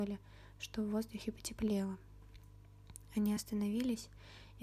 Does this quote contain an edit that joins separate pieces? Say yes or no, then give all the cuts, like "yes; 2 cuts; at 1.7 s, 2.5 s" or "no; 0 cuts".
no; 0 cuts